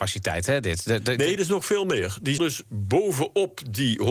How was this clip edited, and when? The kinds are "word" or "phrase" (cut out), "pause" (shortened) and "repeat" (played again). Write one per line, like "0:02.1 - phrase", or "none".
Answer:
0:01.4 - word
0:02.4 - word